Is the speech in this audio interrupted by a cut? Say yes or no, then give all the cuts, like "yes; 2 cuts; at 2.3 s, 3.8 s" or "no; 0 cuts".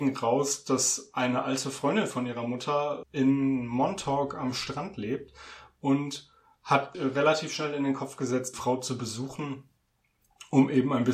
yes; 3 cuts; at 3.0 s, 6.9 s, 8.5 s